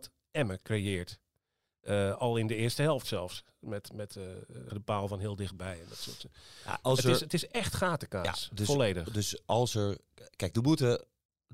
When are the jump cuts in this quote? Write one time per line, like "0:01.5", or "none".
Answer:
0:04.7